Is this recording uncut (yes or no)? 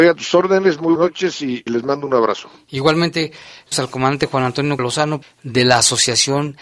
no